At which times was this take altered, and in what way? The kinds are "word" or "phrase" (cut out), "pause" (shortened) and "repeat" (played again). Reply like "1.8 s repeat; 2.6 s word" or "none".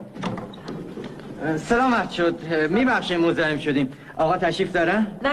none